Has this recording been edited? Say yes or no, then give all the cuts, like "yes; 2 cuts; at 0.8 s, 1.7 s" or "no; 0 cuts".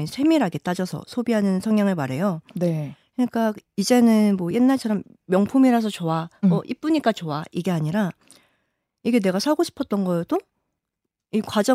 no; 0 cuts